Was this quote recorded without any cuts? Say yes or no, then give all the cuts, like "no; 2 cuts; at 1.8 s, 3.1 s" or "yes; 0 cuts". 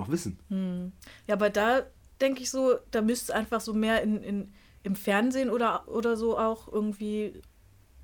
yes; 0 cuts